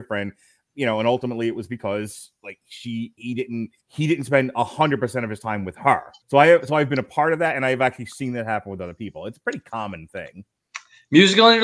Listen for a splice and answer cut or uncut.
cut